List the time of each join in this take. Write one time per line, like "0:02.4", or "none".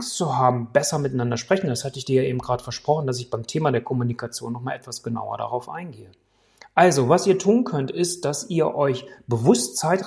none